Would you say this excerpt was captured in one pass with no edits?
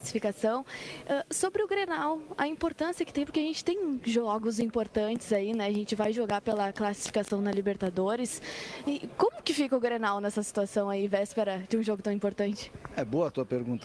yes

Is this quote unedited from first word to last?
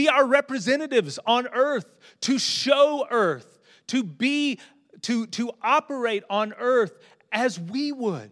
yes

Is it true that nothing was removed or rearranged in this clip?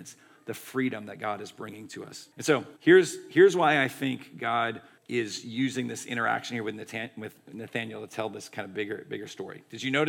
no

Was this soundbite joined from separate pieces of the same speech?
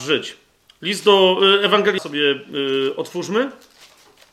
yes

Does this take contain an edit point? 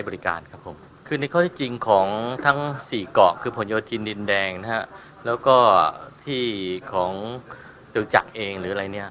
no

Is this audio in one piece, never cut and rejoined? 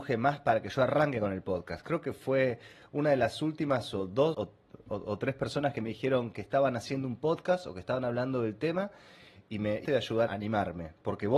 no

